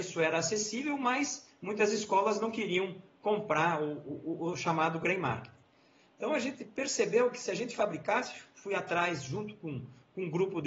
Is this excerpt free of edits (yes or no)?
yes